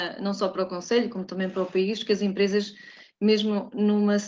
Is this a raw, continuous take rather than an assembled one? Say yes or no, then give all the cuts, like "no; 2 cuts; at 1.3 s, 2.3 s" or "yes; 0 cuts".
yes; 0 cuts